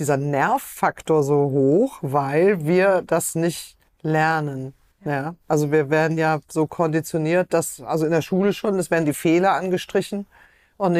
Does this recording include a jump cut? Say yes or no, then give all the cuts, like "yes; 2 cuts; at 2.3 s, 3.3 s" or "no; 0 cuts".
no; 0 cuts